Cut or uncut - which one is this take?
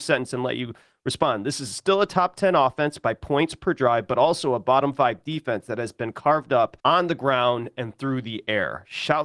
cut